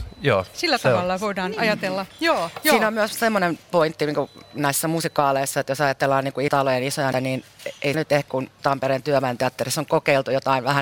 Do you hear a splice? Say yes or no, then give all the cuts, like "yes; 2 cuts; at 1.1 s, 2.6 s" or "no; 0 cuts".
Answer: yes; 5 cuts; at 6.5 s, 7.1 s, 7.9 s, 8.3 s, 8.6 s